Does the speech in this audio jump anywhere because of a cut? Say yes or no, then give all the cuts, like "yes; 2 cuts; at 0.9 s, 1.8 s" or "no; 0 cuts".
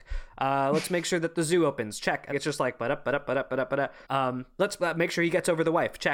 yes; 2 cuts; at 2.3 s, 4.1 s